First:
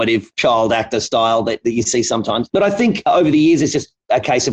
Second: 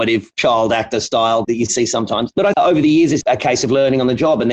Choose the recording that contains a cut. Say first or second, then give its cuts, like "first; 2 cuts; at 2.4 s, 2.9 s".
second; 3 cuts; at 1.4 s, 2.5 s, 3.2 s